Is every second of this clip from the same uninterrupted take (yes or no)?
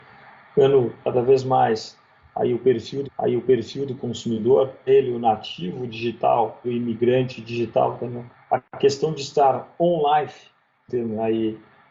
no